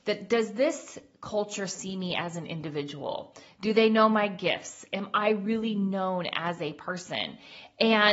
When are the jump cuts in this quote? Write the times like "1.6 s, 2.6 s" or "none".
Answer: none

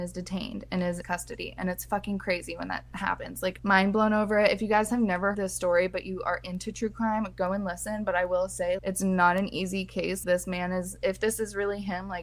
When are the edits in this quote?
1.0 s, 3.6 s, 5.3 s, 8.8 s, 10.2 s

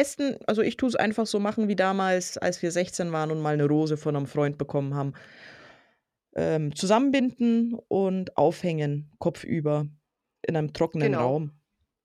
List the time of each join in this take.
none

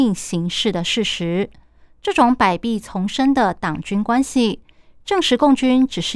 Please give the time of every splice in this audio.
none

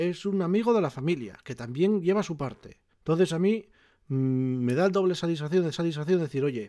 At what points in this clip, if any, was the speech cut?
2.9 s, 5.7 s

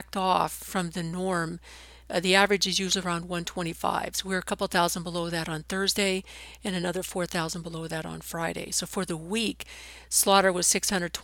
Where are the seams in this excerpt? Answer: none

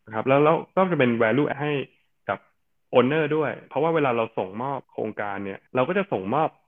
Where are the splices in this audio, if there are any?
1.5 s, 4.8 s, 5.7 s

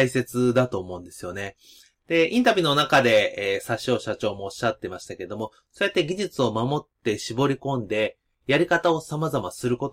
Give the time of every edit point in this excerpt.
none

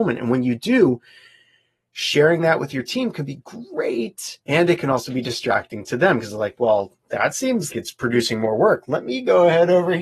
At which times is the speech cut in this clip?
4.4 s, 7.0 s, 7.7 s

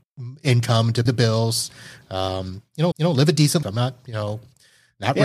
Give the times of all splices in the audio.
1.1 s, 2.9 s, 3.6 s

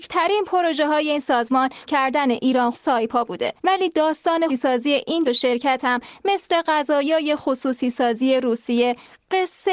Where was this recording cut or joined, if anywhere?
1.9 s, 2.7 s, 3.6 s, 4.5 s, 5.2 s

